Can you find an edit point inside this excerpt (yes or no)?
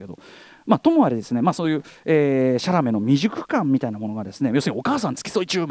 no